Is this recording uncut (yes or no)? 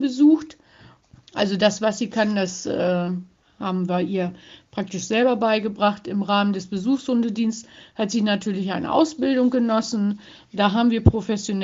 yes